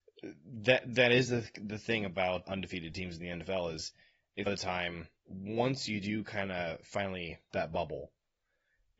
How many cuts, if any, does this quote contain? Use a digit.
4